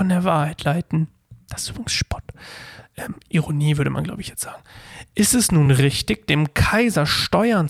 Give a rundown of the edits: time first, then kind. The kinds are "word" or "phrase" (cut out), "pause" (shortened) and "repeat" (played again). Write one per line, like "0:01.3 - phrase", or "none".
none